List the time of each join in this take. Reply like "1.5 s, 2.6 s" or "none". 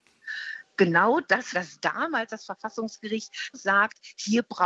1.5 s, 3.5 s

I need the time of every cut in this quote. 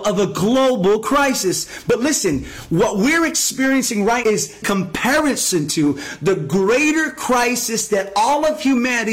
4.2 s, 4.6 s

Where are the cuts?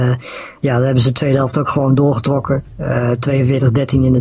none

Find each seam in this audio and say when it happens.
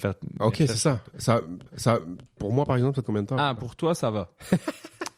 1.7 s, 3.0 s

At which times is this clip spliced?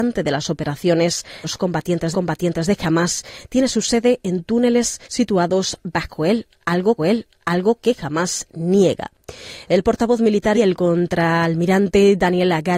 1.4 s, 2.1 s, 5.0 s, 7.0 s, 10.5 s

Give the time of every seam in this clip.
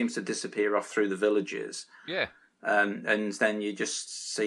none

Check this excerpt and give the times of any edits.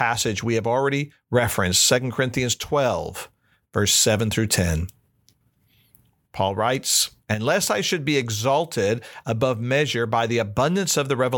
none

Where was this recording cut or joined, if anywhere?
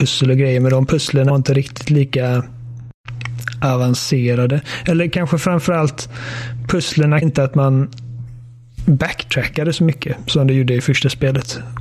1.3 s, 7.2 s

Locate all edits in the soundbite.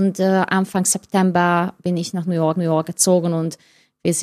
2.6 s

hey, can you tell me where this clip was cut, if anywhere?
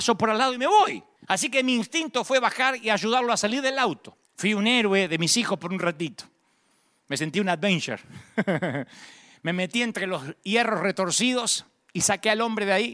1.2 s, 4.2 s

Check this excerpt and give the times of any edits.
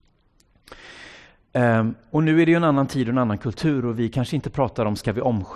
none

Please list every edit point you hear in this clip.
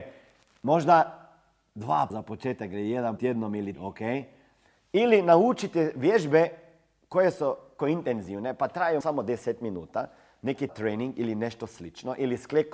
2.1 s, 3.2 s, 3.7 s, 7.8 s, 9.0 s, 10.7 s

